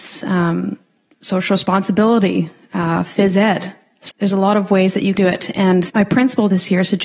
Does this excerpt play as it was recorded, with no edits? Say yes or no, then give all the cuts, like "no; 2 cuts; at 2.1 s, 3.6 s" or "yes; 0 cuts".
no; 2 cuts; at 4.1 s, 5.1 s